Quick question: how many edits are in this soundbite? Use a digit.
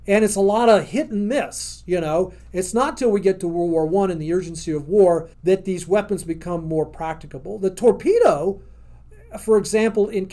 1